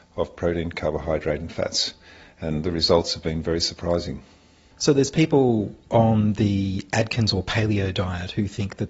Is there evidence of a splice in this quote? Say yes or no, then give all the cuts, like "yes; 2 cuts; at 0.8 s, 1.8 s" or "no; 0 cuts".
no; 0 cuts